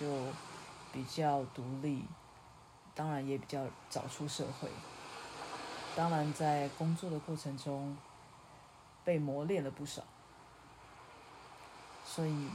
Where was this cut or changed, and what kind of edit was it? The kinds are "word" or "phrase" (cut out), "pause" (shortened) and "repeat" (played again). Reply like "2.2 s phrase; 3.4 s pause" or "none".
5.9 s word